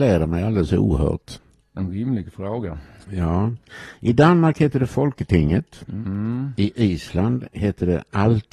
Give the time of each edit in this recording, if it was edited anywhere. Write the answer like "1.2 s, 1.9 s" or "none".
none